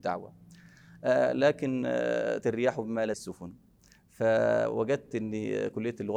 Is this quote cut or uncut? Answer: cut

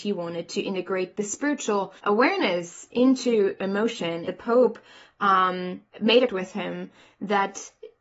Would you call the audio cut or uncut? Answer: cut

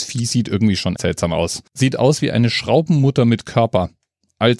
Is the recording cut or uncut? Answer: cut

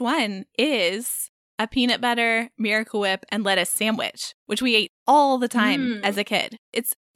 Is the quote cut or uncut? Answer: uncut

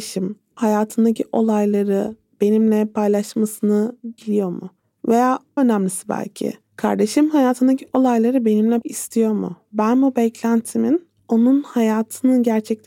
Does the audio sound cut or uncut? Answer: cut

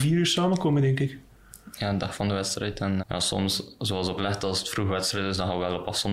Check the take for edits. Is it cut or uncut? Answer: cut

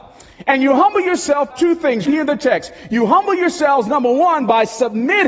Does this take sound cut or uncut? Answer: cut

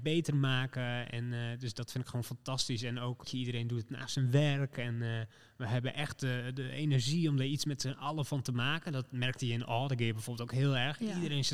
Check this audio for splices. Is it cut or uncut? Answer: uncut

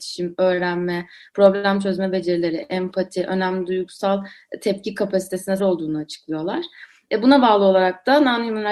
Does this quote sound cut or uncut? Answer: cut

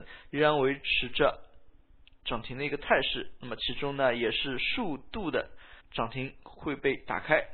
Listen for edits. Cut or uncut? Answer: cut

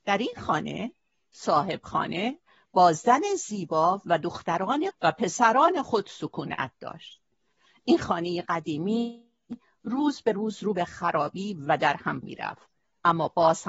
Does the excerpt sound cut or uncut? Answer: cut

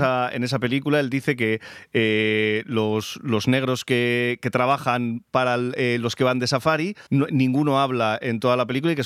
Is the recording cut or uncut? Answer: cut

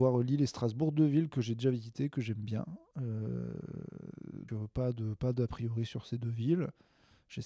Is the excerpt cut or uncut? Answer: cut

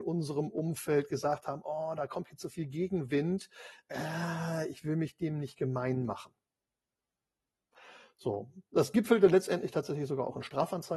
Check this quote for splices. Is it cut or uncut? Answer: uncut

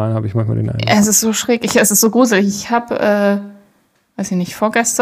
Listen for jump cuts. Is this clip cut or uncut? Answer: uncut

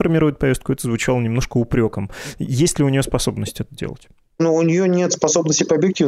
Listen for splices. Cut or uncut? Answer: uncut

